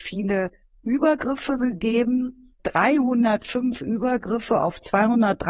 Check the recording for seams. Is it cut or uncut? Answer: cut